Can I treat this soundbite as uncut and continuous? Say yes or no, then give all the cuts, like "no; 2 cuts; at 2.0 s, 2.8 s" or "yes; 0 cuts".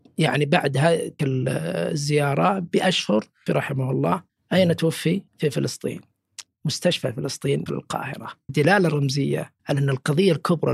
no; 8 cuts; at 1.2 s, 3.5 s, 4.3 s, 5.3 s, 6.5 s, 7.7 s, 8.5 s, 9.6 s